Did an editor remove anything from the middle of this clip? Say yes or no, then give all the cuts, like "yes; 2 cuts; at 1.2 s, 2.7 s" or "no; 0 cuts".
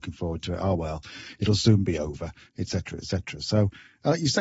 no; 0 cuts